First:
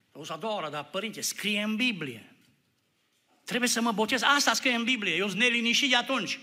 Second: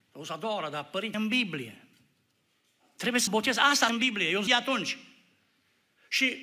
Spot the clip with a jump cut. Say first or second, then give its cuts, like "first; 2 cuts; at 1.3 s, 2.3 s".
second; 4 cuts; at 1.1 s, 3.3 s, 3.9 s, 4.5 s